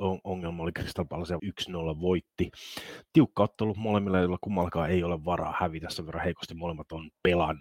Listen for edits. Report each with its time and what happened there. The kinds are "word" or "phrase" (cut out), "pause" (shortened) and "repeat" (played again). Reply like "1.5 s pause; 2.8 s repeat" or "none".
1.4 s phrase